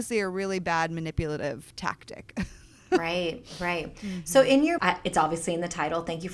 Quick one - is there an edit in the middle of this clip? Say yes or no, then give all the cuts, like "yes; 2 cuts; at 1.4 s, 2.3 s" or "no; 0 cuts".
yes; 1 cut; at 4.8 s